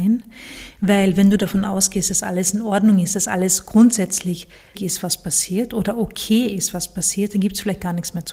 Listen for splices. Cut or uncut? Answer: cut